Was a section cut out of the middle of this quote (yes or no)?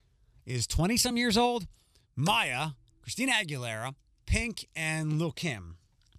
no